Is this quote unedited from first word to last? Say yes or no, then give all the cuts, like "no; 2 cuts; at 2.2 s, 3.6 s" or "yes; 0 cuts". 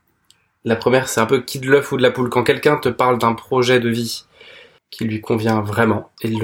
yes; 0 cuts